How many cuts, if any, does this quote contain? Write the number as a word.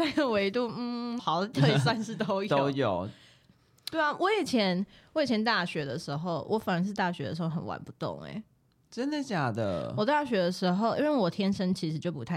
one